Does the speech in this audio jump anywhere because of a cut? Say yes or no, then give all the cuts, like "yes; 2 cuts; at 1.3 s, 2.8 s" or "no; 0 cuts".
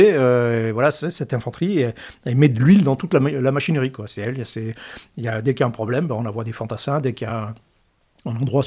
no; 0 cuts